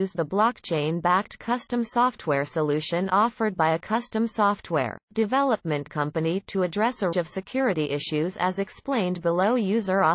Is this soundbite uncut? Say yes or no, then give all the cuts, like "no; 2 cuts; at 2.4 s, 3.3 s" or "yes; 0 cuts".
no; 2 cuts; at 5.0 s, 7.1 s